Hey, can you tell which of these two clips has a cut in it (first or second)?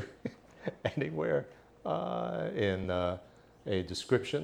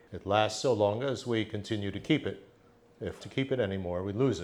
second